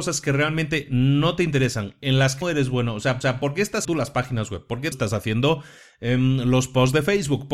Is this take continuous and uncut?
no; 4 cuts; at 2.4 s, 3.2 s, 3.8 s, 4.9 s

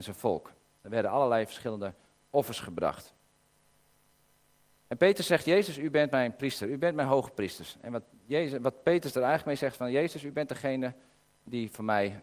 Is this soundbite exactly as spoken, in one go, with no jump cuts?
yes; 0 cuts

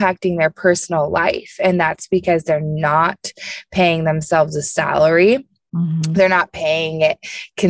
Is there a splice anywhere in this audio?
no; 0 cuts

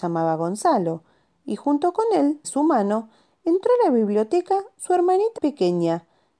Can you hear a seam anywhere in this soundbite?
yes; 2 cuts; at 2.4 s, 5.4 s

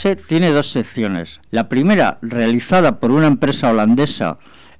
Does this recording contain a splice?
yes; 1 cut; at 1.5 s

